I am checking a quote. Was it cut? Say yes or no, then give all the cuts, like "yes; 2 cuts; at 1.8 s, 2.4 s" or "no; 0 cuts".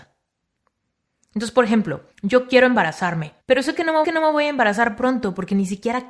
yes; 3 cuts; at 2.1 s, 3.4 s, 4.0 s